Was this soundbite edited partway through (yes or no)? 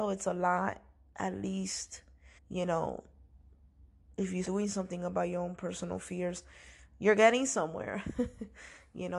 yes